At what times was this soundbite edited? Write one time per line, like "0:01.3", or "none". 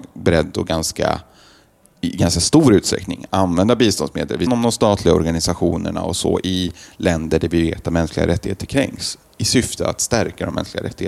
0:04.5